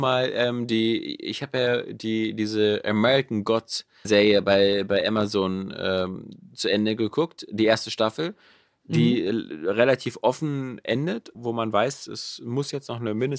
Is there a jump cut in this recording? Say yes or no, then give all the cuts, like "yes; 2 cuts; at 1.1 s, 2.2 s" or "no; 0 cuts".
yes; 2 cuts; at 4.0 s, 11.3 s